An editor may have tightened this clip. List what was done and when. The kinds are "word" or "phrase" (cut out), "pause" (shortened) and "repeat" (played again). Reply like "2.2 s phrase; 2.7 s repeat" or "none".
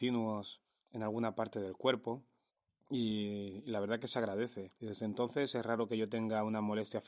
2.5 s pause; 4.8 s pause

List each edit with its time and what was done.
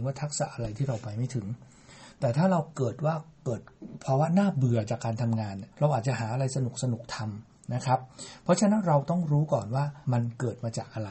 5.7 s pause; 10.0 s pause

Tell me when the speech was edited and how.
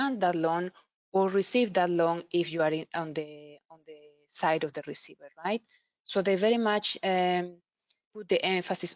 none

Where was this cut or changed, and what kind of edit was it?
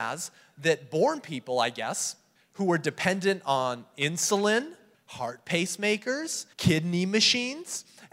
2.4 s pause; 4.9 s pause; 6.5 s pause

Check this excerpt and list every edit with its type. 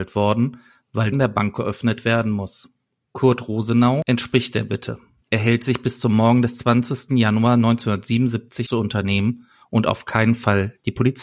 1.1 s phrase; 8.7 s phrase

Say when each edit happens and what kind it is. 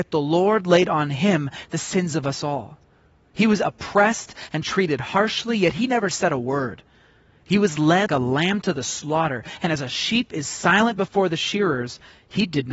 8.1 s word

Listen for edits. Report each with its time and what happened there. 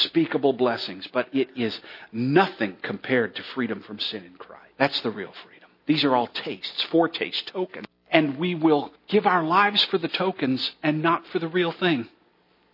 4.7 s pause; 5.8 s pause; 7.9 s pause; 8.9 s pause

